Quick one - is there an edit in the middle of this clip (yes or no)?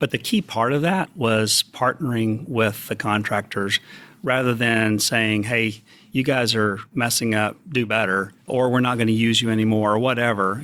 no